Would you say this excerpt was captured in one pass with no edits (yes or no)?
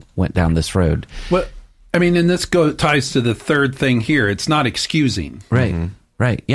yes